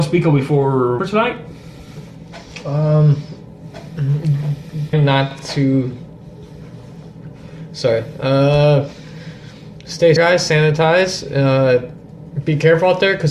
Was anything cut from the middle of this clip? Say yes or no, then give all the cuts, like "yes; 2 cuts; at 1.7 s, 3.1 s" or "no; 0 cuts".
yes; 3 cuts; at 1.0 s, 4.9 s, 10.2 s